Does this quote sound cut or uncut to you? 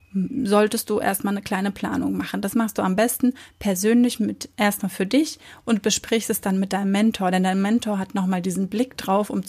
uncut